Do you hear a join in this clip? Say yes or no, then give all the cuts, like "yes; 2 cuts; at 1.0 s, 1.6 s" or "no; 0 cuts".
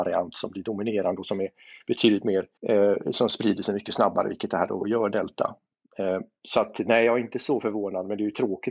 yes; 1 cut; at 2.6 s